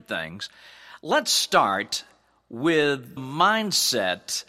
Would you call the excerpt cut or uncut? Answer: cut